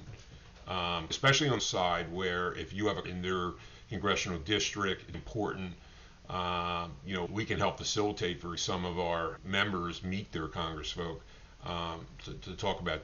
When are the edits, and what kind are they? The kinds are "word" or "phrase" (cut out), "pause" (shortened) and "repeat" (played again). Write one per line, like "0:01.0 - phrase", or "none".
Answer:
0:01.1 - word
0:01.6 - phrase
0:03.0 - phrase
0:05.1 - word
0:07.3 - word
0:08.6 - phrase
0:09.4 - word